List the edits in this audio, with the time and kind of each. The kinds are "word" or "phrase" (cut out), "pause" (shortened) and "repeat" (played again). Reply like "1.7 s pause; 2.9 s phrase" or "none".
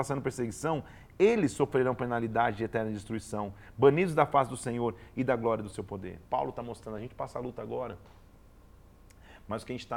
6.3 s pause

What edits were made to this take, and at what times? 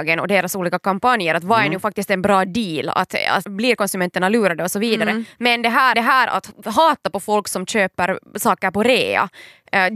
3.4 s word; 5.9 s repeat

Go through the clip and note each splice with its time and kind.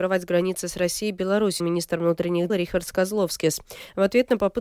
1.6 s word; 2.5 s word

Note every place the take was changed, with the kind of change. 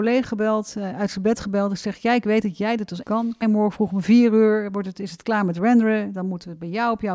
2.2 s phrase; 3.0 s word; 3.4 s word

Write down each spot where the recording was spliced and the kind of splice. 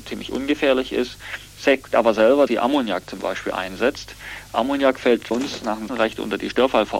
1.9 s word; 2.5 s word; 5.3 s word; 5.9 s word

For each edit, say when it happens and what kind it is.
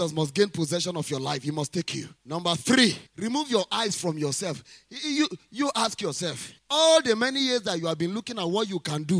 2.2 s pause; 3.1 s pause; 6.6 s pause

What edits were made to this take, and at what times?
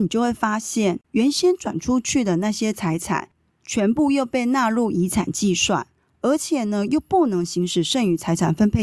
1.0 s pause

